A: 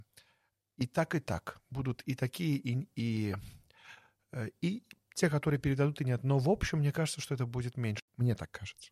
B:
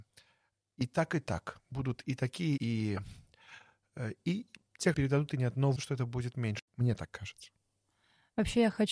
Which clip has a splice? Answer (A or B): B